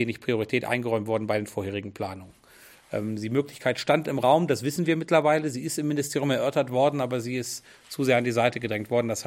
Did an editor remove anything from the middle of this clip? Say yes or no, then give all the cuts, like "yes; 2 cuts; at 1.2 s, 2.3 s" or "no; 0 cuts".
no; 0 cuts